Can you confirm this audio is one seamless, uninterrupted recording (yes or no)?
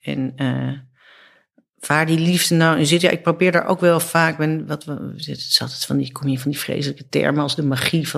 yes